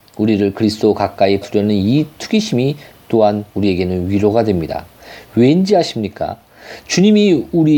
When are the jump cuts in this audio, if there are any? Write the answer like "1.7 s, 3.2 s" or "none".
1.4 s, 3.5 s